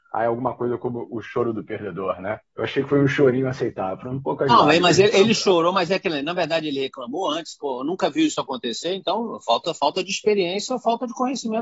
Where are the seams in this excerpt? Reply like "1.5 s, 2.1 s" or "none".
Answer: 2.4 s